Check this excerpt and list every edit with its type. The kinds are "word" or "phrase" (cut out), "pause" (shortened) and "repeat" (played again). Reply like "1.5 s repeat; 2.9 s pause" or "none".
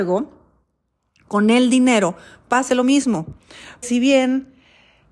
2.7 s word; 3.8 s word